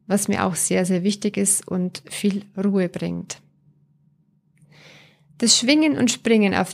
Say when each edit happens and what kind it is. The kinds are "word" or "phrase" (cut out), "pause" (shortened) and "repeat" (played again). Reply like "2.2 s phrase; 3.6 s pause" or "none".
none